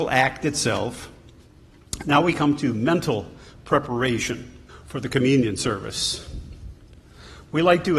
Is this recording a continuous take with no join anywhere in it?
no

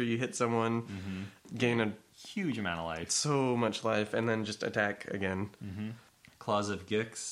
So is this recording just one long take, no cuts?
yes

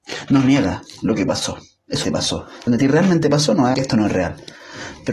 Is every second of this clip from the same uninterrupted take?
no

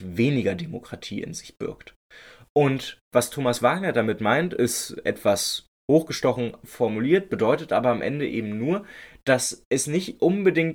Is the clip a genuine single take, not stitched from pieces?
yes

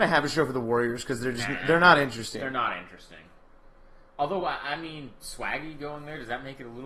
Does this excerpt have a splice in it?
no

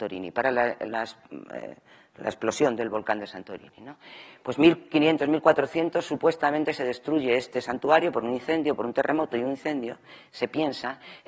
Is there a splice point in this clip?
yes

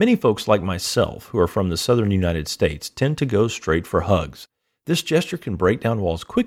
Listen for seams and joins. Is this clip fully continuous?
yes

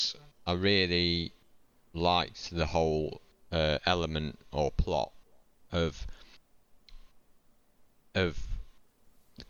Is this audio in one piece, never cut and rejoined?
yes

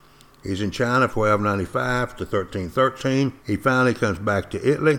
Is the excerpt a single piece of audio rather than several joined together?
no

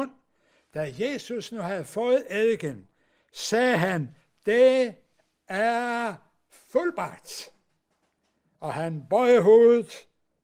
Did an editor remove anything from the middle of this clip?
no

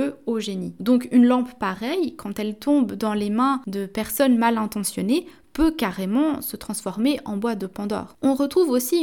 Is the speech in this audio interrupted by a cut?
no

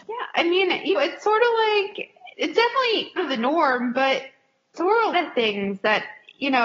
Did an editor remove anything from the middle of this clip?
yes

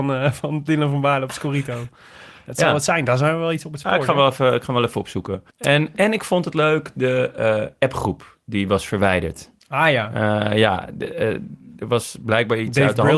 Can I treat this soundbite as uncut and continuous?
no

